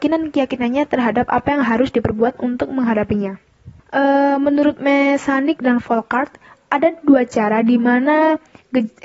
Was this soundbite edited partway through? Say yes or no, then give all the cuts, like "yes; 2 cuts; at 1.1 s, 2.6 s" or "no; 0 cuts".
yes; 1 cut; at 3.8 s